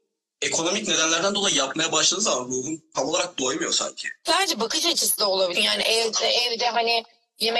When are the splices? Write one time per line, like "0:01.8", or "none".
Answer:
0:05.6

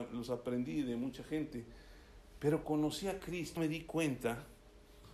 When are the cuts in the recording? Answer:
0:02.6
0:03.6

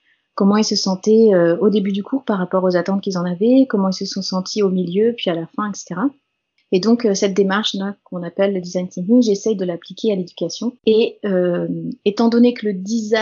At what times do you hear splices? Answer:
0:10.8

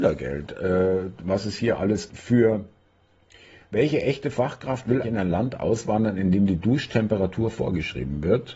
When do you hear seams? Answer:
0:02.1
0:05.0

